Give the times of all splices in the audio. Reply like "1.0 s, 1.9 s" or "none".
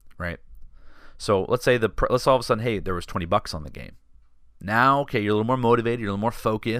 none

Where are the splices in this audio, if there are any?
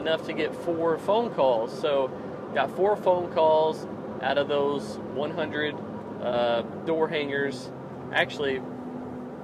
none

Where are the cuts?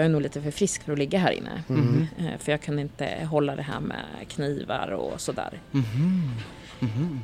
none

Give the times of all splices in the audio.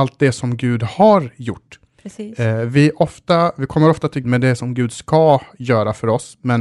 4.2 s

